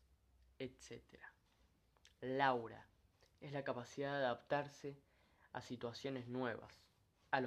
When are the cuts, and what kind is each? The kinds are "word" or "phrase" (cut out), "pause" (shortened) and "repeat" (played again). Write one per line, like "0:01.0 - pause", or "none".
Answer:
none